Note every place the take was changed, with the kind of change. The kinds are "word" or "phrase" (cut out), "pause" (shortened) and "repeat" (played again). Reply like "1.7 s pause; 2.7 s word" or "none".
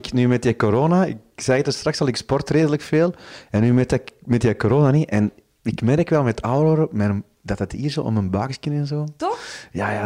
none